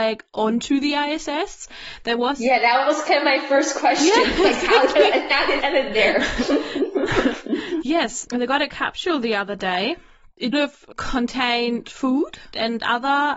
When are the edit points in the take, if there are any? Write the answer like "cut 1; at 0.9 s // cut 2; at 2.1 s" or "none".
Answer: cut 1; at 5.6 s // cut 2; at 7.8 s // cut 3; at 10.5 s // cut 4; at 10.9 s